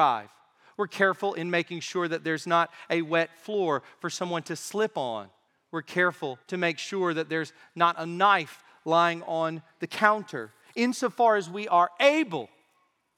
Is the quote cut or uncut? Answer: cut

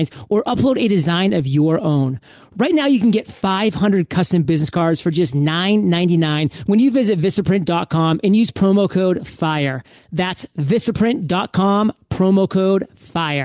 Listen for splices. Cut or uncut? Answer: uncut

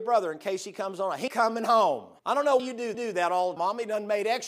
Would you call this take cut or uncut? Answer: cut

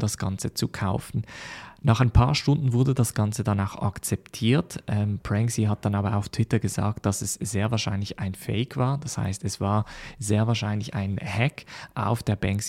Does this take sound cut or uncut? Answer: uncut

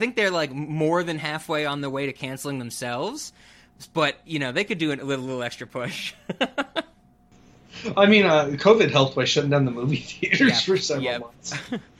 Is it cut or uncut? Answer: uncut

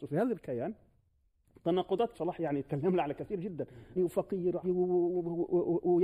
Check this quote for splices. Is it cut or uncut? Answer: cut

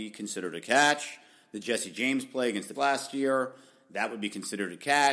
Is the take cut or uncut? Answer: cut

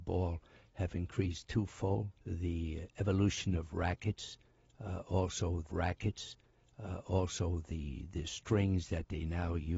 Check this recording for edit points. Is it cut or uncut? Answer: cut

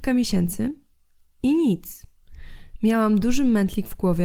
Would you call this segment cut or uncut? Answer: uncut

